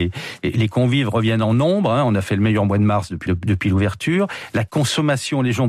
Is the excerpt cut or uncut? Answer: cut